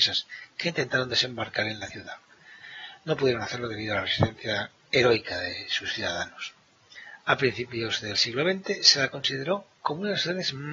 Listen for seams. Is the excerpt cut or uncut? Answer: cut